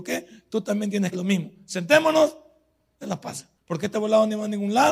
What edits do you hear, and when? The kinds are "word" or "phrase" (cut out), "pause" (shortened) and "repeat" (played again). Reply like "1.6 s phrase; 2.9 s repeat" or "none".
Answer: 1.1 s phrase; 3.0 s phrase; 3.6 s pause